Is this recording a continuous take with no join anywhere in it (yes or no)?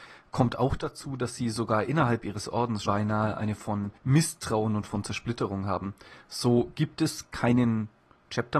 no